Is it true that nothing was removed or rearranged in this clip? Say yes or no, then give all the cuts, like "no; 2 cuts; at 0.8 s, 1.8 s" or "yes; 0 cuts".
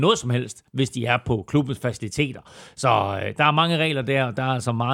yes; 0 cuts